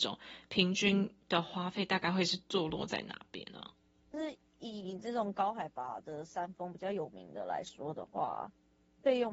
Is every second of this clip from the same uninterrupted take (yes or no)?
yes